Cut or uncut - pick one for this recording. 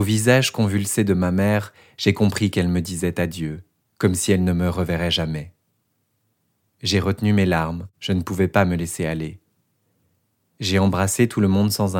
cut